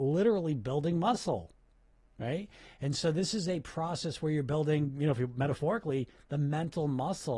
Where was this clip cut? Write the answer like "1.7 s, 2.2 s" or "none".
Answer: none